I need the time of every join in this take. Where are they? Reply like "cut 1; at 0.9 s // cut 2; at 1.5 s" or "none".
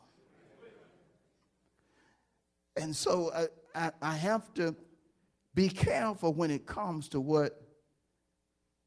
none